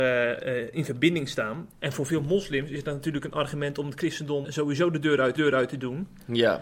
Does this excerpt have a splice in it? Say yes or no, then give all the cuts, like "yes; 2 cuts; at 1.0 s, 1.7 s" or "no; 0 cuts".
yes; 3 cuts; at 1.7 s, 4.4 s, 5.4 s